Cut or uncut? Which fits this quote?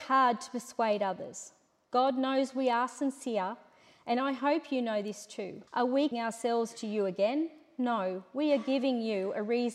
cut